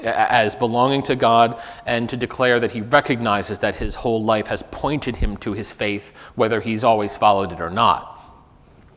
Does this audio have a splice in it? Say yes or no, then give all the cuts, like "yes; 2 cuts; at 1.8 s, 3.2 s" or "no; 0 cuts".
no; 0 cuts